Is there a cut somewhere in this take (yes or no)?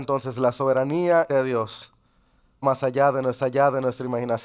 yes